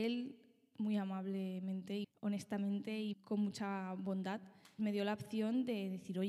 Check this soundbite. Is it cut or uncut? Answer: cut